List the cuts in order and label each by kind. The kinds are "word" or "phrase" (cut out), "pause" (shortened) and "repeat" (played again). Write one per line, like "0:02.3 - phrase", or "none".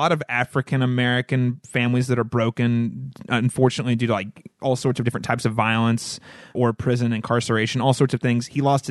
0:06.5 - word